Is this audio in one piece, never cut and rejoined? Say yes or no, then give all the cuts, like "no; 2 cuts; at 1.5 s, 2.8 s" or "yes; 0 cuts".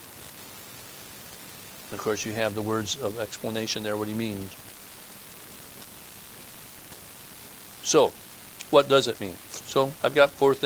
yes; 0 cuts